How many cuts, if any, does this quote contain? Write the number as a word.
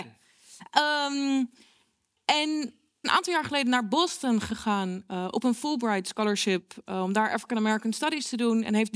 one